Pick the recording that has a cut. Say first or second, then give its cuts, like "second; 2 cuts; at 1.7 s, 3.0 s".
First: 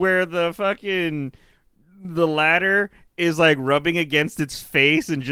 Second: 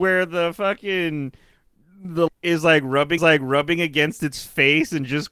second; 2 cuts; at 2.3 s, 3.2 s